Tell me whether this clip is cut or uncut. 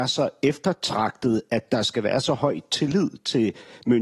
uncut